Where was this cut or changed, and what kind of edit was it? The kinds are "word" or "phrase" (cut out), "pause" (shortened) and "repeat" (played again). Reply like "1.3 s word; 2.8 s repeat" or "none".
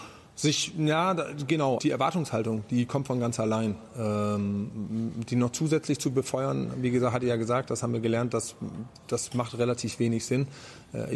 1.8 s word